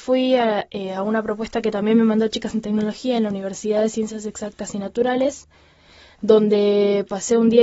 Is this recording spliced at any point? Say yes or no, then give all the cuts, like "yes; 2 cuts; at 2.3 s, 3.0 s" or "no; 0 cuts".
no; 0 cuts